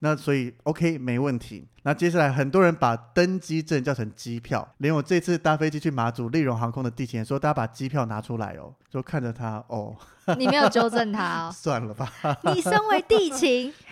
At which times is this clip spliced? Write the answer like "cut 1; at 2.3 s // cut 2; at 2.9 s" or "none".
cut 1; at 1.8 s // cut 2; at 4.7 s